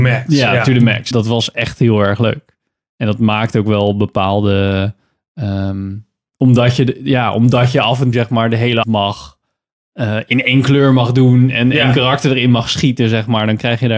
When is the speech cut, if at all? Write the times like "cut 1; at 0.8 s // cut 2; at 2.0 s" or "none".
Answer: cut 1; at 1.1 s // cut 2; at 8.1 s // cut 3; at 8.8 s